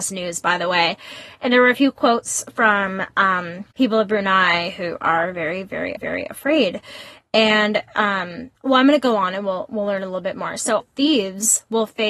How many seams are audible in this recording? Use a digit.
4